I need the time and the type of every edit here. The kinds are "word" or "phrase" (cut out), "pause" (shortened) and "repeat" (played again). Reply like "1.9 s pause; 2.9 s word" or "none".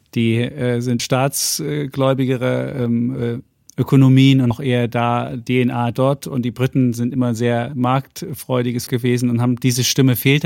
1.0 s word; 4.5 s word; 5.5 s word; 8.9 s word